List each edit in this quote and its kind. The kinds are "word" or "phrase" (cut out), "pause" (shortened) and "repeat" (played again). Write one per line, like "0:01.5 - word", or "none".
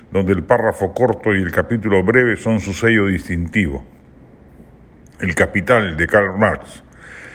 none